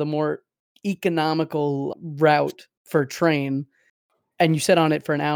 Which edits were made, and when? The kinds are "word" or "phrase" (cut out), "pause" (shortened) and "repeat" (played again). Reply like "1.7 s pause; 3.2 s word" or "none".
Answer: 1.9 s word